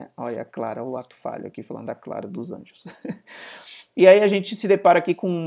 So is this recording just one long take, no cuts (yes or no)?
yes